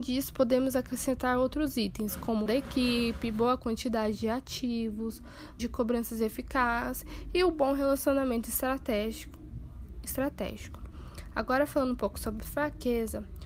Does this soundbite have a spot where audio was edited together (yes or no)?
yes